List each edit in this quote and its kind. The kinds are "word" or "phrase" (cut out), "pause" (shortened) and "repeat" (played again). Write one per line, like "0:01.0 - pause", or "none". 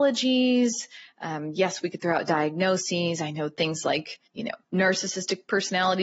0:04.3 - pause
0:04.6 - pause

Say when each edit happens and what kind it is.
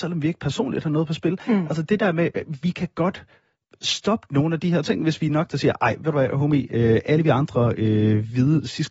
none

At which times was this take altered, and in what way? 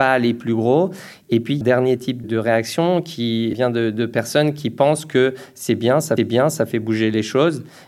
0:01.6 - phrase
0:02.2 - word
0:03.5 - word
0:06.2 - repeat

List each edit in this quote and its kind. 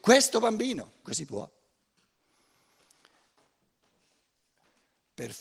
0:01.0 - word

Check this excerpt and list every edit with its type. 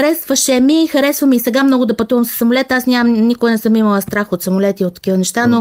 none

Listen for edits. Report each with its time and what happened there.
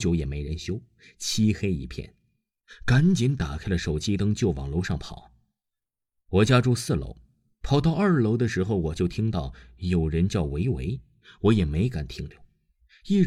none

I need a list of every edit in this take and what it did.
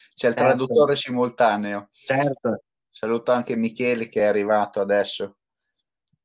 none

